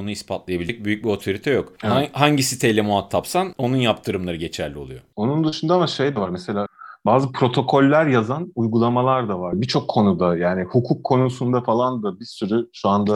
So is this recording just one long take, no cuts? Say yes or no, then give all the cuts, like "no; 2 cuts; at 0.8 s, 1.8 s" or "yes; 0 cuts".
yes; 0 cuts